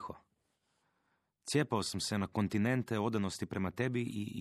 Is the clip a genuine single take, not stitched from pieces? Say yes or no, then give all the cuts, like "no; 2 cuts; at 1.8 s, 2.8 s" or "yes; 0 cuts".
yes; 0 cuts